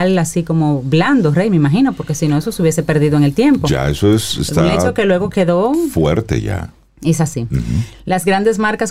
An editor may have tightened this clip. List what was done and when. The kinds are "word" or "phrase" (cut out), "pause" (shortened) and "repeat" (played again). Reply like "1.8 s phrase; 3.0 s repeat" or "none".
none